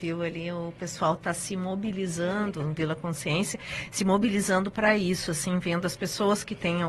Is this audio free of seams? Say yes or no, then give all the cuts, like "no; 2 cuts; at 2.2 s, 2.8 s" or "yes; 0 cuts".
yes; 0 cuts